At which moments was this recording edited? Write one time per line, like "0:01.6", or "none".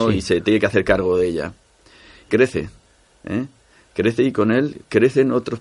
0:02.3